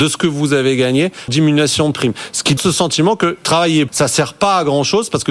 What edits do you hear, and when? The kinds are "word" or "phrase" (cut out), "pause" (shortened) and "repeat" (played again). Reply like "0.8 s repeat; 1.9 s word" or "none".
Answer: 1.3 s word; 2.6 s word; 3.9 s word